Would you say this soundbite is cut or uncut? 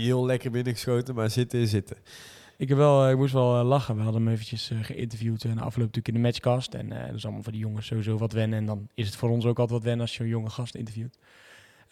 uncut